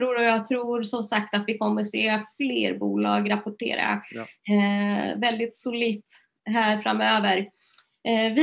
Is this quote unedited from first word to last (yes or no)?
yes